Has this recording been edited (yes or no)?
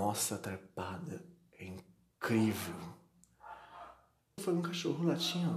yes